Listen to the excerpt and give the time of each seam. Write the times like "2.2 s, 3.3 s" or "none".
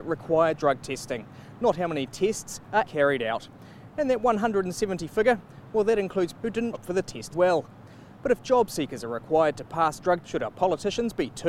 2.9 s, 5.1 s, 6.3 s, 6.7 s, 7.3 s, 10.2 s